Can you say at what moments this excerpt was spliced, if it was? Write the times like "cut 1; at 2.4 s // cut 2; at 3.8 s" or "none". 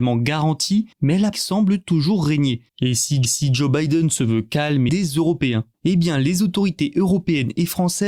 cut 1; at 0.9 s // cut 2; at 1.3 s // cut 3; at 2.7 s // cut 4; at 3.2 s // cut 5; at 4.9 s // cut 6; at 5.7 s